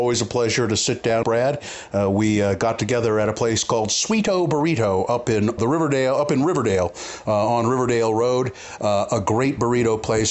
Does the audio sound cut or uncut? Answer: cut